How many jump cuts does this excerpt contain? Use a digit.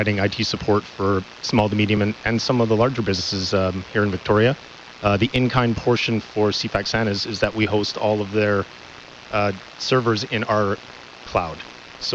0